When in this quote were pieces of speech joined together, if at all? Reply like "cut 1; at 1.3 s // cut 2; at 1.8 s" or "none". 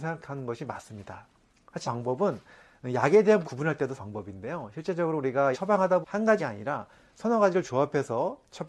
cut 1; at 1.8 s // cut 2; at 3.4 s // cut 3; at 4.0 s // cut 4; at 5.5 s // cut 5; at 6.0 s // cut 6; at 6.4 s